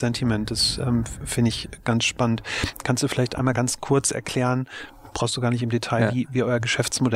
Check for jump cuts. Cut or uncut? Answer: uncut